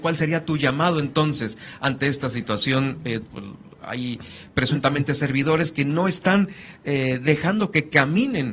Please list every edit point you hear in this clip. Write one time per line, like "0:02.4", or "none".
0:03.2